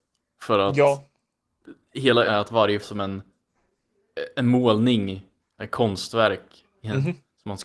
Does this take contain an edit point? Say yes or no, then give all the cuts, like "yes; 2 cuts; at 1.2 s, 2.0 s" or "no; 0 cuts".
yes; 3 cuts; at 2.3 s, 2.8 s, 5.6 s